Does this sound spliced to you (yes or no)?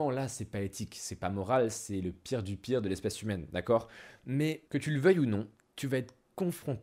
no